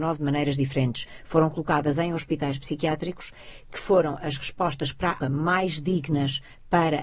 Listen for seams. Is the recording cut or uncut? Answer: cut